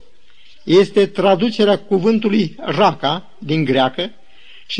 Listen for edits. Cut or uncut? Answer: uncut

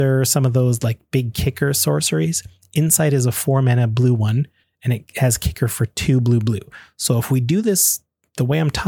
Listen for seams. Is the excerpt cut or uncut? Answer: uncut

